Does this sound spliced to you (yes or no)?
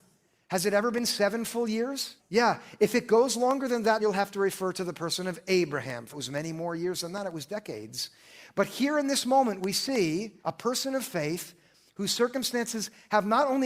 yes